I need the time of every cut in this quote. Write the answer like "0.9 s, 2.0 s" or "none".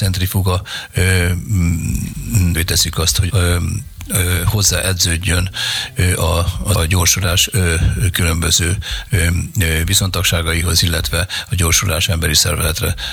2.5 s, 3.3 s, 6.7 s